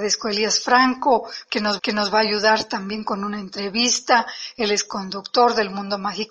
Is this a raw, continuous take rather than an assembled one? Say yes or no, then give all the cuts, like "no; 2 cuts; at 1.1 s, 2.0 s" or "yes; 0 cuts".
no; 1 cut; at 1.8 s